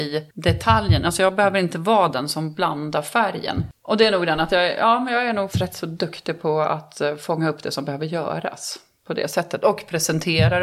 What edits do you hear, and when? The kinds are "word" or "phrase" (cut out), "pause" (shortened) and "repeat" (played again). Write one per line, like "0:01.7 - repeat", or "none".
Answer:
0:05.5 - word